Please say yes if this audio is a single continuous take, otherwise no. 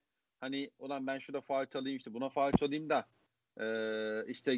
yes